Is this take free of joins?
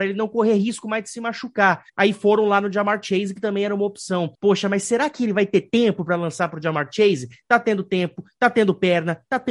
no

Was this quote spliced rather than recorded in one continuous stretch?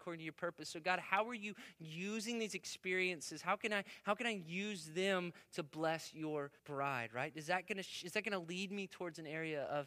yes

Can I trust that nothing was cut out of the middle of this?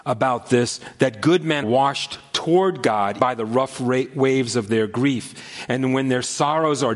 no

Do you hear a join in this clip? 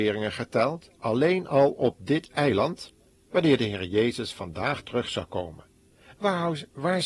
yes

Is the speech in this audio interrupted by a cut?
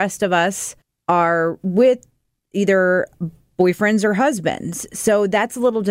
no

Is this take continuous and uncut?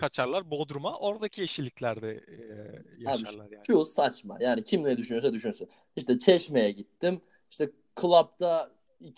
yes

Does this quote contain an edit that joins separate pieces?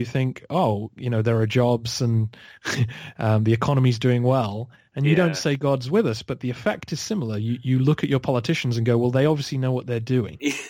no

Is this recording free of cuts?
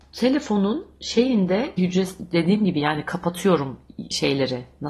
no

